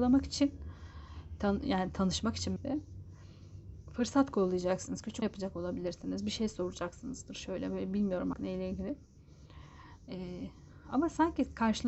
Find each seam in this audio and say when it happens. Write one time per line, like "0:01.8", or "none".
0:02.6
0:05.2
0:08.3